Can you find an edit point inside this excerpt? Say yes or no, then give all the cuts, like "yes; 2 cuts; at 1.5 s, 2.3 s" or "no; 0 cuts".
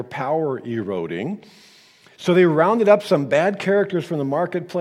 no; 0 cuts